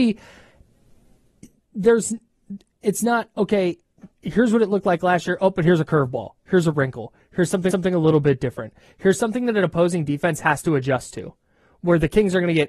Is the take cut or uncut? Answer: cut